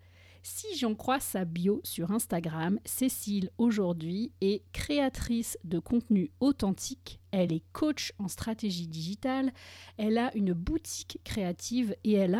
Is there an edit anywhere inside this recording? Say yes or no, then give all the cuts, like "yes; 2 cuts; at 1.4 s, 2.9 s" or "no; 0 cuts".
no; 0 cuts